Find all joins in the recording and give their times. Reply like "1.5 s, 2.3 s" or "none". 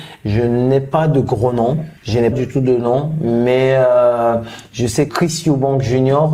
2.0 s, 2.3 s, 5.1 s